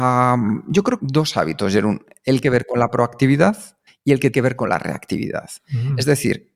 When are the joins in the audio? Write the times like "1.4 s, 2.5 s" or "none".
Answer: 1.0 s, 2.4 s, 3.9 s, 4.3 s